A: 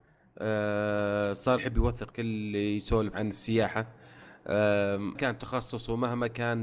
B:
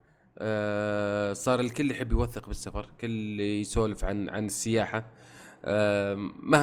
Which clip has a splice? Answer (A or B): A